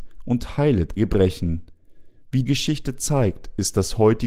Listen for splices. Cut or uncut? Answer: cut